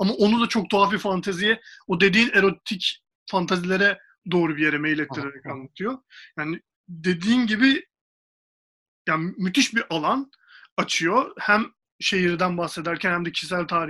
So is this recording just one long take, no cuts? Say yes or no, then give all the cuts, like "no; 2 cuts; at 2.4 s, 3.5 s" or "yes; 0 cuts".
yes; 0 cuts